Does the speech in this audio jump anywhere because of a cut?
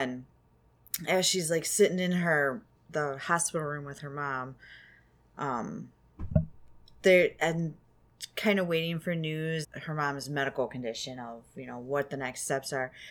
yes; 1 cut; at 9.6 s

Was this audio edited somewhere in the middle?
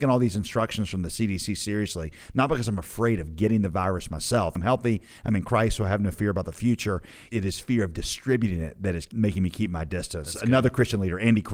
yes; 1 cut; at 4.6 s

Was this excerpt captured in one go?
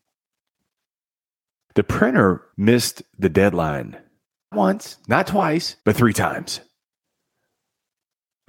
no; 3 cuts; at 2.5 s, 4.5 s, 5.8 s

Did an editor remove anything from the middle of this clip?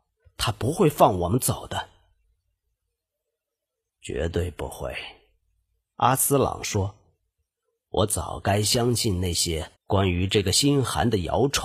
yes; 1 cut; at 9.7 s

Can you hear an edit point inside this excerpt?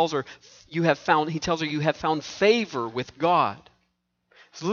no; 0 cuts

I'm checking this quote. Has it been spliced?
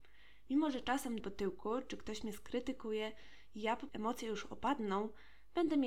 yes; 2 cuts; at 1.2 s, 3.9 s

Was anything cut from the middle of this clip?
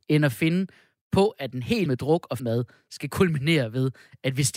yes; 2 cuts; at 1.9 s, 2.4 s

